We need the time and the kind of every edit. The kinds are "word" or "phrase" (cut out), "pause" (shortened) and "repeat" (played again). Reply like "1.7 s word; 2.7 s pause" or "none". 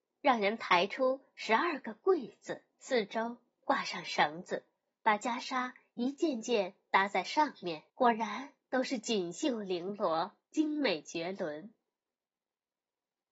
2.7 s pause; 4.8 s pause; 7.9 s pause